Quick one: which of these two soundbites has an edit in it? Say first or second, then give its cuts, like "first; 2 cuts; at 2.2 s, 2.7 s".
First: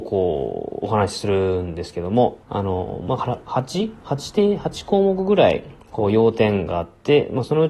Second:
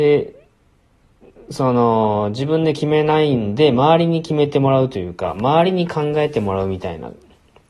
first; 1 cut; at 2.4 s